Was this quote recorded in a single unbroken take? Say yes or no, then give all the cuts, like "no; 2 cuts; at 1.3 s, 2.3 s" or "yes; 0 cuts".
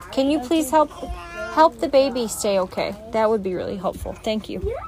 yes; 0 cuts